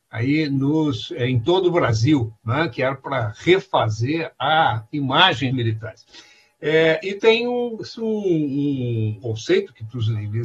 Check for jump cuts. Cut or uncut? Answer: cut